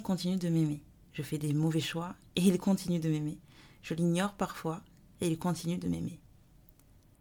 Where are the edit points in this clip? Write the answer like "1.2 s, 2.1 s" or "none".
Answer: none

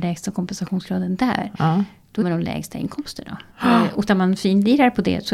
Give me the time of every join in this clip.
2.2 s, 3.5 s, 4.1 s

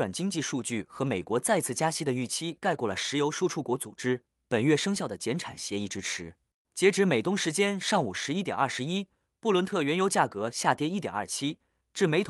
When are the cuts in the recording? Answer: none

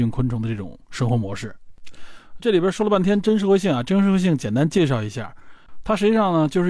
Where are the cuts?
2.4 s

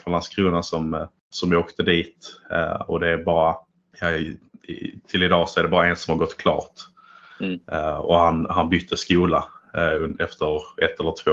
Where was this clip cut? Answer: 1.2 s

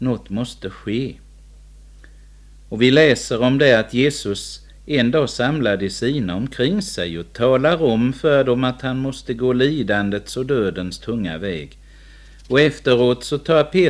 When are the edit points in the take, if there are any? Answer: none

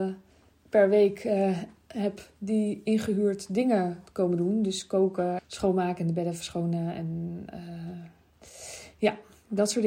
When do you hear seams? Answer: 5.4 s

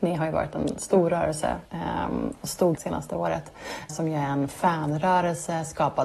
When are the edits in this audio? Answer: 1.7 s, 2.7 s, 3.9 s

